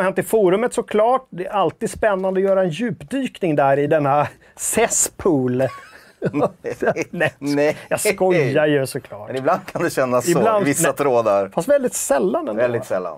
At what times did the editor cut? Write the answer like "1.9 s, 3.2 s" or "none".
none